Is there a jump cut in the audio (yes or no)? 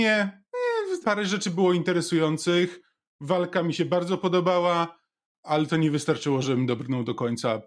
yes